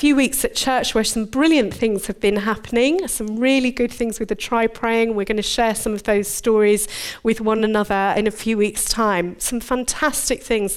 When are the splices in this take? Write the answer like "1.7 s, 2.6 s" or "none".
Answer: none